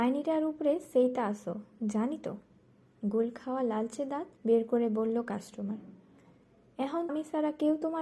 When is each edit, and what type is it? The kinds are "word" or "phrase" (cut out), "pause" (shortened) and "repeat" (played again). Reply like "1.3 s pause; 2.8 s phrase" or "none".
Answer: 4.4 s pause; 7.1 s word

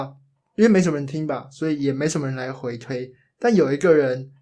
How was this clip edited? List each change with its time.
none

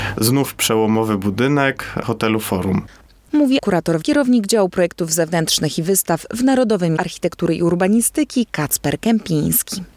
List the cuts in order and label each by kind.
3.6 s word; 4.0 s word; 7.0 s word

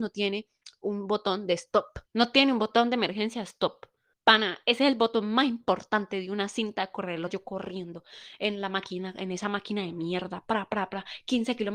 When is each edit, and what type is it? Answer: 2.1 s pause; 4.1 s pause; 7.3 s phrase

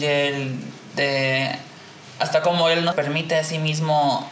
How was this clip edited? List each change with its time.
2.9 s word

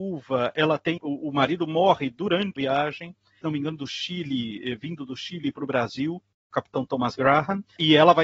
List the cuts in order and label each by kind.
1.0 s word; 2.6 s word

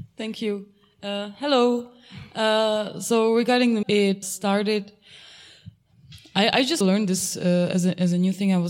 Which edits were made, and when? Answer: 3.8 s word; 4.2 s word; 6.8 s word

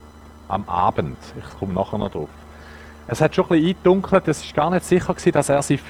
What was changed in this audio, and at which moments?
none

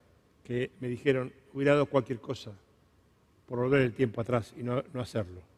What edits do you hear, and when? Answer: none

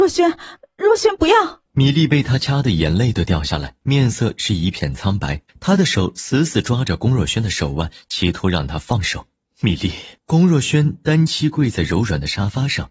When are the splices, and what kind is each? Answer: 1.7 s pause; 3.8 s pause; 5.5 s pause; 9.4 s pause; 10.2 s pause

